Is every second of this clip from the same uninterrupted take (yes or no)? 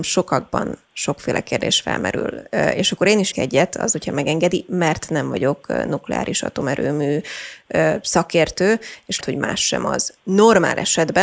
no